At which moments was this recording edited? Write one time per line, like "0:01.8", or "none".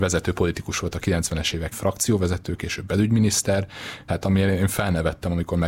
0:01.7
0:04.1